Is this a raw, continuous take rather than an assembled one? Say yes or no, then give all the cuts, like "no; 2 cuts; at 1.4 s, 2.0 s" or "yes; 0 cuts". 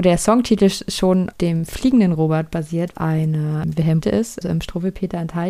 no; 4 cuts; at 1.3 s, 2.9 s, 4.0 s, 4.4 s